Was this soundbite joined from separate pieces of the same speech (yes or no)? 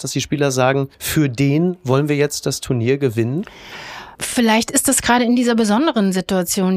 yes